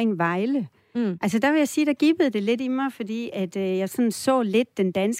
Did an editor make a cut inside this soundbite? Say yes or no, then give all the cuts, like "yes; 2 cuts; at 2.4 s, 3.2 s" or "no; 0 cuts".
no; 0 cuts